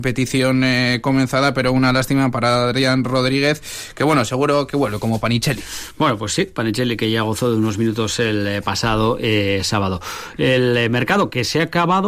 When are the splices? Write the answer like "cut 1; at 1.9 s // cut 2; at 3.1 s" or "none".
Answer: none